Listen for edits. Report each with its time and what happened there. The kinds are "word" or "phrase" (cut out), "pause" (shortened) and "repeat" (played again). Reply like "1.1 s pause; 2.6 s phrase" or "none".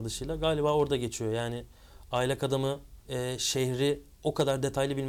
3.0 s pause